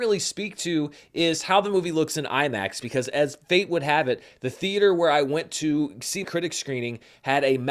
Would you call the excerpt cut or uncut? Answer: cut